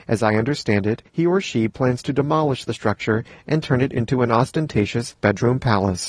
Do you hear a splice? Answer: yes; 2 cuts; at 1.1 s, 5.2 s

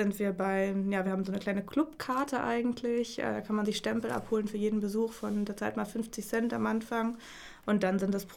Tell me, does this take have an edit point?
no; 0 cuts

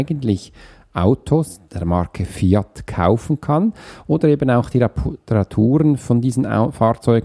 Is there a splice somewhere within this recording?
no; 0 cuts

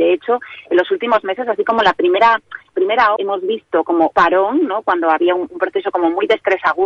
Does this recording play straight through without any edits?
no; 3 cuts; at 2.7 s, 3.2 s, 4.1 s

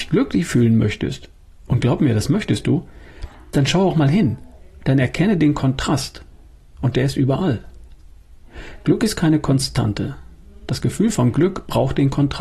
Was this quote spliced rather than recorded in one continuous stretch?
no; 0 cuts

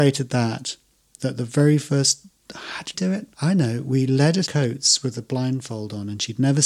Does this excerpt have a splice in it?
yes; 4 cuts; at 1.2 s, 2.9 s, 3.3 s, 4.5 s

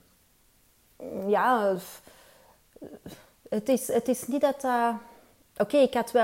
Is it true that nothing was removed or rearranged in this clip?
yes; 0 cuts

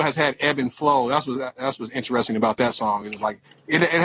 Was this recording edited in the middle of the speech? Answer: no; 0 cuts

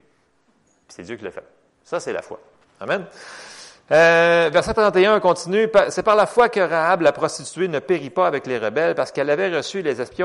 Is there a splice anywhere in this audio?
no; 0 cuts

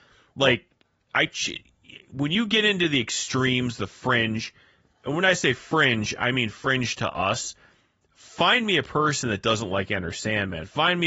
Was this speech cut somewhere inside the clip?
no; 0 cuts

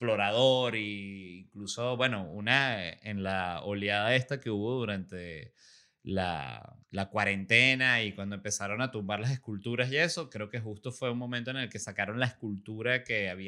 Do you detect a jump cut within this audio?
yes; 1 cut; at 6.8 s

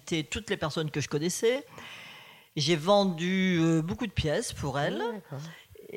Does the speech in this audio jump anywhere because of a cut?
no; 0 cuts

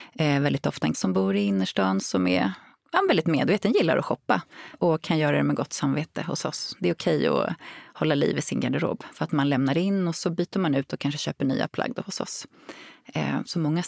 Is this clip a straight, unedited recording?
no; 2 cuts; at 0.9 s, 4.7 s

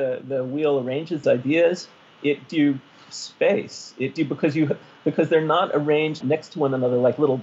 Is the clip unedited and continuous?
no; 4 cuts; at 1.2 s, 2.5 s, 4.2 s, 6.2 s

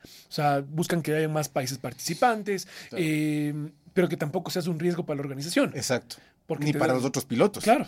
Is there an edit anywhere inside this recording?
no; 0 cuts

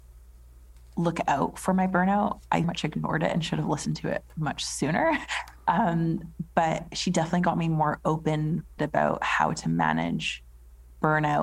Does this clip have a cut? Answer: yes; 3 cuts; at 2.6 s, 6.9 s, 8.8 s

